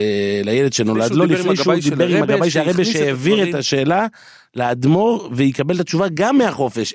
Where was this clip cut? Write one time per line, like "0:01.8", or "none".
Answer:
none

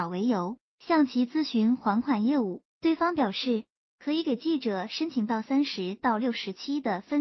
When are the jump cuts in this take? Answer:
none

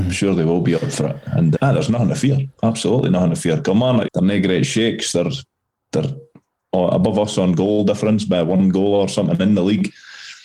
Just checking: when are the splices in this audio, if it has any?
0:01.6
0:04.1

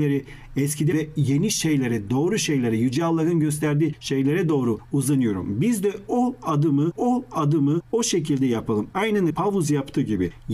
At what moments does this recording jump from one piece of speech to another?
0:00.9
0:06.9
0:09.3

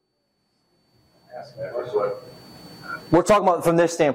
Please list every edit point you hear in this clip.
none

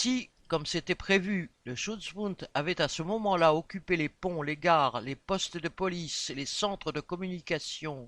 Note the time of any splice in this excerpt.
none

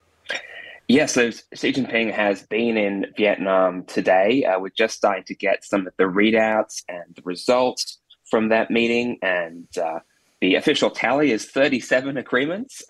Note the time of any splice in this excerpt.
none

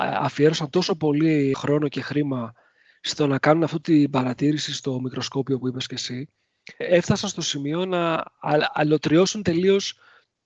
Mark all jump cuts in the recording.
0:01.5
0:03.8
0:06.8

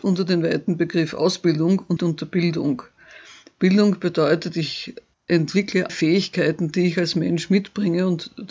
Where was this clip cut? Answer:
0:02.0
0:05.9

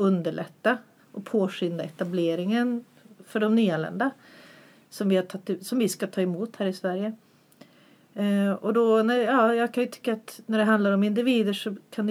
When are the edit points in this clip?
none

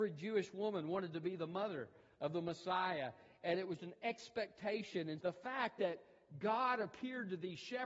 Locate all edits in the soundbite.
0:03.8
0:05.2

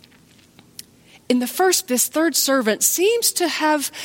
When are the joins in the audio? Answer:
0:01.8

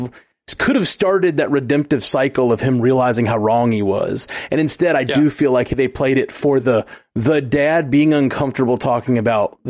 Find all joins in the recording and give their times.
none

